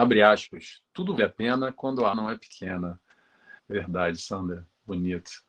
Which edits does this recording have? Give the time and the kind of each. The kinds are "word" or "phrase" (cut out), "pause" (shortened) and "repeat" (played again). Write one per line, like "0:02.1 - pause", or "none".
0:01.2 - word
0:02.1 - word
0:03.6 - pause